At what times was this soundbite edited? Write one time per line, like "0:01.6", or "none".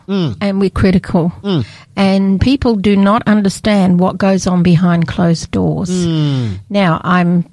0:02.4